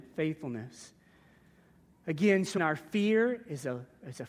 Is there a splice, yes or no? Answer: yes